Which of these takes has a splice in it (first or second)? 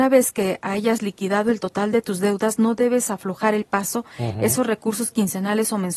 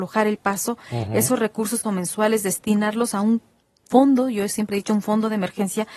second